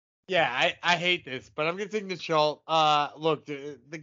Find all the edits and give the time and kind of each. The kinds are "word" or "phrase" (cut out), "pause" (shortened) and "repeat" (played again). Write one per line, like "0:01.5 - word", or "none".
0:02.2 - word